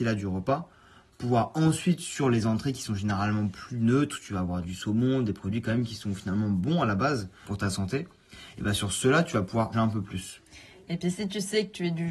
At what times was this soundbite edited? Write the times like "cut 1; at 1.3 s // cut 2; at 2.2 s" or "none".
cut 1; at 4.6 s // cut 2; at 7.4 s // cut 3; at 9.7 s